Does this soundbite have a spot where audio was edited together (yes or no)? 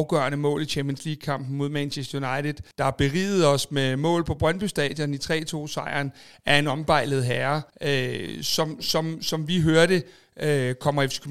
yes